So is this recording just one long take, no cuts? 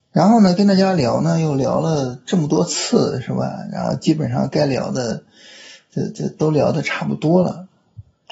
yes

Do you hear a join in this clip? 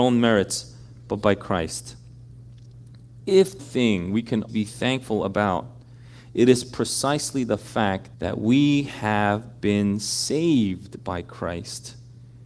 yes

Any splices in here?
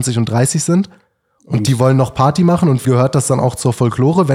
yes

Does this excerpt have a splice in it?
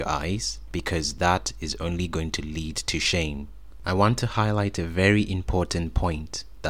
no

